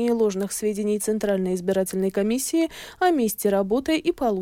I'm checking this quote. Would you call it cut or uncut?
uncut